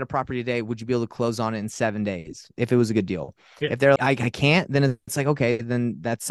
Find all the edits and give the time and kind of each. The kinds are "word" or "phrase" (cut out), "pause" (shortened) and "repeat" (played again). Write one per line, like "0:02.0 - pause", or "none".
0:04.0 - word